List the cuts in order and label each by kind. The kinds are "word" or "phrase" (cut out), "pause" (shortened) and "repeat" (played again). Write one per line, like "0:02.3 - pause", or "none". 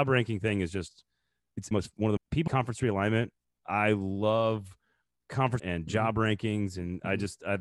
0:01.7 - word
0:02.2 - word
0:02.5 - word
0:05.6 - word